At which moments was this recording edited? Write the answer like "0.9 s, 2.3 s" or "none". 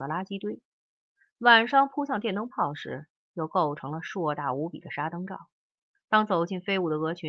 5.9 s